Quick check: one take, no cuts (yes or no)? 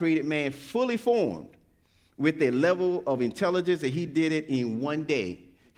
yes